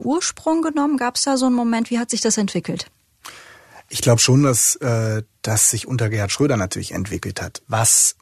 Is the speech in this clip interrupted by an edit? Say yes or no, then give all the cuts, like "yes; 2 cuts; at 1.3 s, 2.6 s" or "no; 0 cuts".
no; 0 cuts